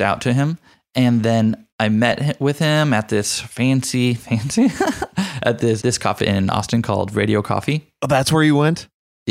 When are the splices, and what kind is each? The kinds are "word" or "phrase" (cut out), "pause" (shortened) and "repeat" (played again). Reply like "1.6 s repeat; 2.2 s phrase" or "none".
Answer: 1.7 s pause; 4.2 s word; 5.8 s word; 6.2 s word